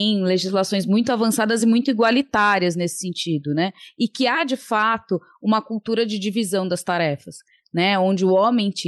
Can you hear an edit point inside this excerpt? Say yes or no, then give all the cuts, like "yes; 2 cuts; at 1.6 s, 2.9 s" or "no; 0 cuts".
no; 0 cuts